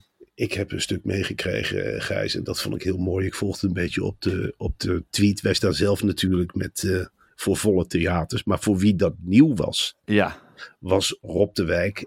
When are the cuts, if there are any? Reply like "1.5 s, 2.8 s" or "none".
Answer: none